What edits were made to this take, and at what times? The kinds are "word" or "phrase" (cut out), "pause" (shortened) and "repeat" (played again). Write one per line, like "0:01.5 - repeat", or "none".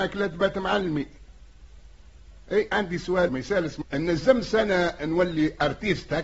0:02.7 - word
0:03.3 - word
0:03.8 - phrase